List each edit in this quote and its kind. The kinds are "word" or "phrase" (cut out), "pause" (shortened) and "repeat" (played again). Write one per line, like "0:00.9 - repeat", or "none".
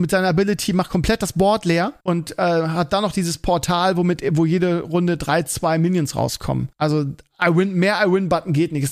0:02.0 - pause
0:06.7 - pause

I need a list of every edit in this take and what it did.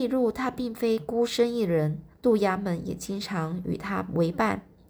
0:02.1 - pause

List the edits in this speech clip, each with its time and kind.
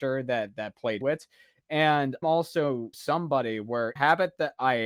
0:01.0 - word
0:02.2 - word
0:02.9 - word
0:04.0 - phrase

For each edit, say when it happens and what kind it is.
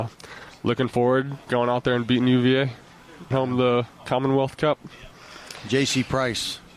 0:01.5 - word
0:03.3 - word

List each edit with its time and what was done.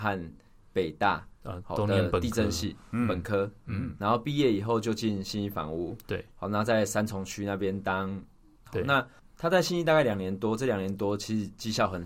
0:08.6 - word
0:09.2 - pause

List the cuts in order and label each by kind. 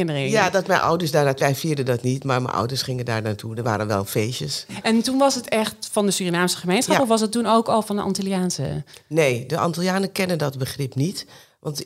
0:01.4 - word

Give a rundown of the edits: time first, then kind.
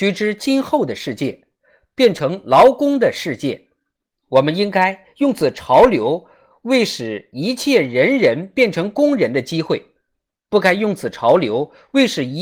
none

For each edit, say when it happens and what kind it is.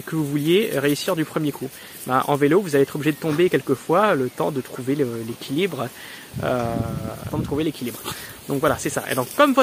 0:07.3 - phrase

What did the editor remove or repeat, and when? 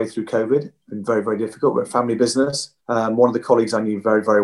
0:02.8 - pause

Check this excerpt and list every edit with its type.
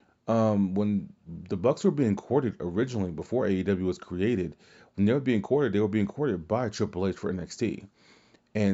none

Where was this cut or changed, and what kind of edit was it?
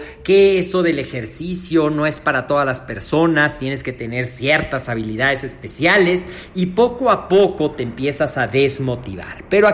none

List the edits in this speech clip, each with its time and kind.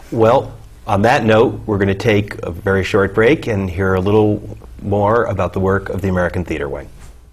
none

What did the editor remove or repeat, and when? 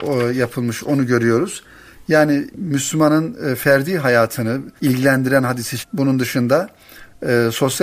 0:02.5 - word
0:04.8 - pause
0:05.8 - word

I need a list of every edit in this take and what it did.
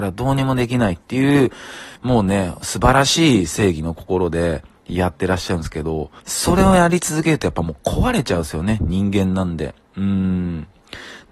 0:02.0 - pause
0:06.2 - pause

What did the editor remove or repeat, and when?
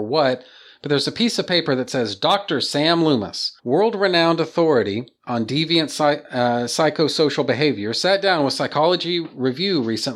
0:03.6 - pause

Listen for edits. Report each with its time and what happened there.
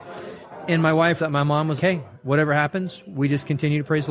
0:01.2 - word
0:01.8 - word

